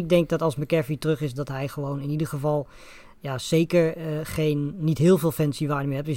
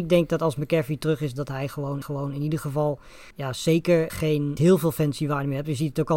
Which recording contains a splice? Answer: second; 4 cuts; at 2.0 s, 3.3 s, 4.1 s, 4.6 s

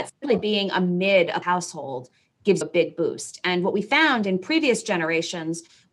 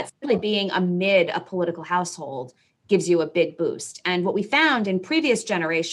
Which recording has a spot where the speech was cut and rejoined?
first; 2 cuts; at 1.4 s, 2.6 s

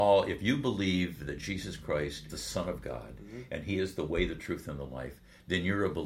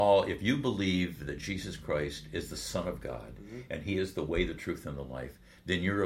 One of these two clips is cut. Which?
first; 1 cut; at 2.3 s

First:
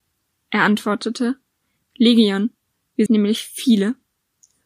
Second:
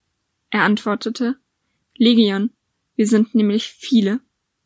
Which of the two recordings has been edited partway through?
first; 1 cut; at 3.1 s

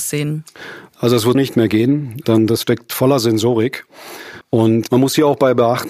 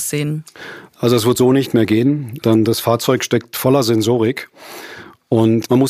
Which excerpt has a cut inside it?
first; 3 cuts; at 1.3 s, 2.6 s, 4.4 s

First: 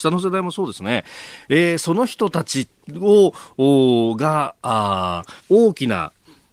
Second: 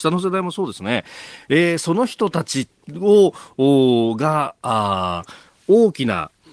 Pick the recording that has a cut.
first; 1 cut; at 5.4 s

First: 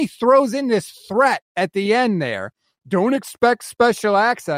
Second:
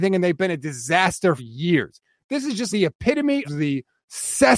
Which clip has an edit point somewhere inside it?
second; 3 cuts; at 1.4 s, 2.7 s, 3.4 s

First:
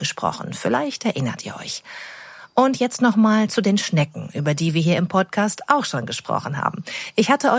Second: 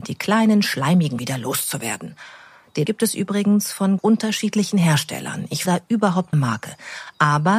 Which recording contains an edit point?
second; 5 cuts; at 1.2 s, 2.9 s, 4.0 s, 5.6 s, 6.3 s

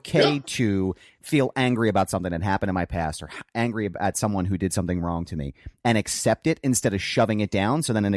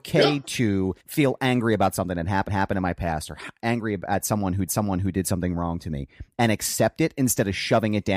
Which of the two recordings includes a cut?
second; 3 cuts; at 1.0 s, 2.5 s, 4.7 s

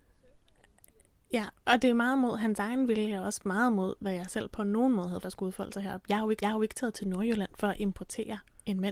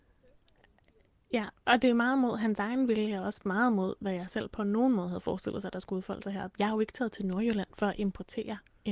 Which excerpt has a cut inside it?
first; 2 cuts; at 5.2 s, 6.4 s

